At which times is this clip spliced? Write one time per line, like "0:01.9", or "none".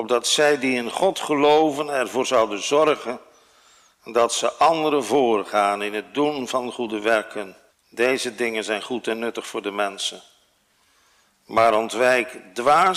0:07.7